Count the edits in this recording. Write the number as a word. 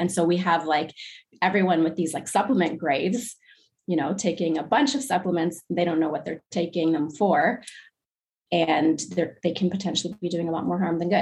zero